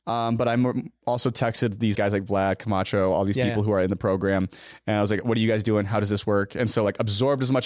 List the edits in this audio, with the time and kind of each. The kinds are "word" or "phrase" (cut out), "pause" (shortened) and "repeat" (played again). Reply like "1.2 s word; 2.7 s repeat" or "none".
1.9 s word